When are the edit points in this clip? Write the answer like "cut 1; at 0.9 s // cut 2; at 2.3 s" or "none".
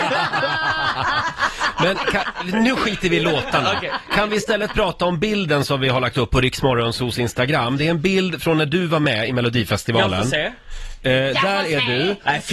none